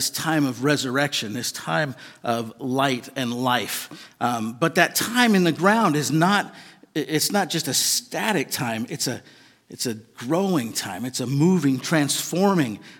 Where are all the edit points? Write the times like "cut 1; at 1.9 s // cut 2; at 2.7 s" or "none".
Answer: none